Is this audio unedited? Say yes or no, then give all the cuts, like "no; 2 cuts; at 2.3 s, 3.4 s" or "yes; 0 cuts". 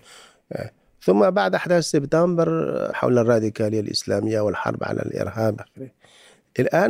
no; 2 cuts; at 2.9 s, 5.6 s